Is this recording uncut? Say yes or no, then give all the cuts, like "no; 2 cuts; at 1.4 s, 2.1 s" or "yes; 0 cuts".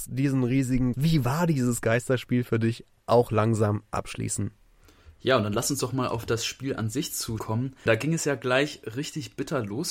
no; 3 cuts; at 0.9 s, 7.4 s, 7.9 s